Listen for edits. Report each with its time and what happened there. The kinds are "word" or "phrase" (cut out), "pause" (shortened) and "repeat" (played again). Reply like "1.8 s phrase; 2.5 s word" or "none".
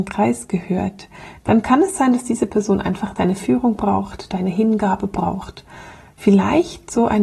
none